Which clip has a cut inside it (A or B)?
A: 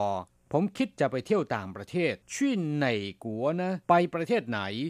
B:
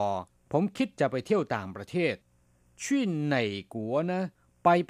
A